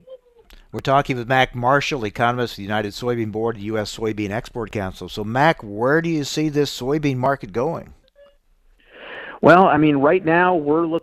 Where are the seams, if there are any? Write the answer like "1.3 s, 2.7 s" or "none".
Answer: none